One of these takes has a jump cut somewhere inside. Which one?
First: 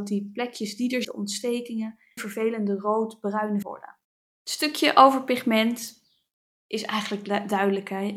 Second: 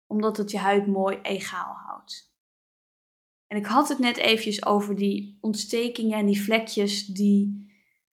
first; 4 cuts; at 1.0 s, 2.2 s, 3.6 s, 4.0 s

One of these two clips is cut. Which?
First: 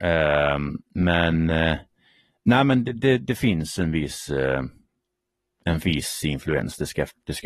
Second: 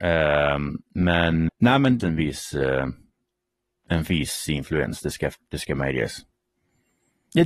second; 2 cuts; at 1.5 s, 2.0 s

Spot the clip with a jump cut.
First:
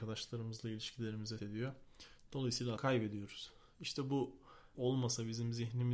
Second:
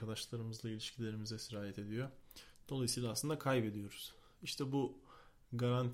first; 3 cuts; at 1.4 s, 2.8 s, 4.7 s

